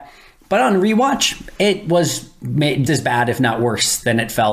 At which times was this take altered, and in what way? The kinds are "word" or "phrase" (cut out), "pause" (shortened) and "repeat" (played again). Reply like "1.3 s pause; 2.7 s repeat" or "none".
2.9 s word